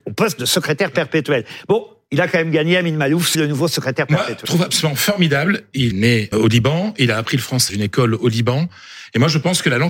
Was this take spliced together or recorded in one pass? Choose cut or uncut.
cut